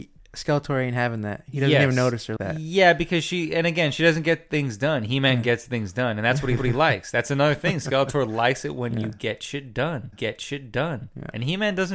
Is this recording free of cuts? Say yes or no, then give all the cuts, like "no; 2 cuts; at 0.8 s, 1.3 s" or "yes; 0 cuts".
no; 3 cuts; at 2.4 s, 6.6 s, 10.1 s